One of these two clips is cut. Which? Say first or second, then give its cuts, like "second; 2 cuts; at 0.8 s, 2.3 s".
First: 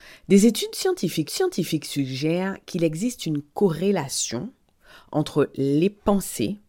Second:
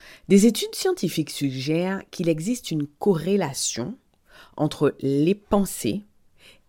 first; 1 cut; at 1.3 s